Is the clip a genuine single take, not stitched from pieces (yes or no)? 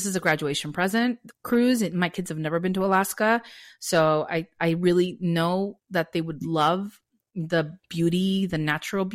yes